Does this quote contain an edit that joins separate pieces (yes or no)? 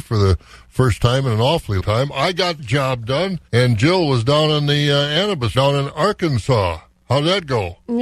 yes